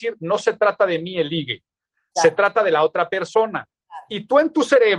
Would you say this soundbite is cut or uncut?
uncut